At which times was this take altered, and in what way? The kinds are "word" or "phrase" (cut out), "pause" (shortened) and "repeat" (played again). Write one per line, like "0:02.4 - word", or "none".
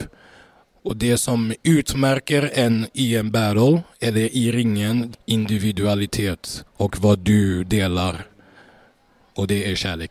0:05.1 - phrase